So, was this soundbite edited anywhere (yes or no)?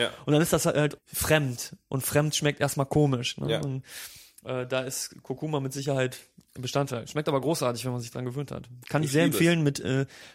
yes